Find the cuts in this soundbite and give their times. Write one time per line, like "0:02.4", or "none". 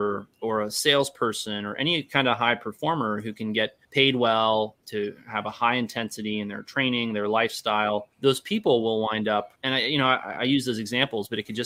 0:03.8
0:08.1
0:09.6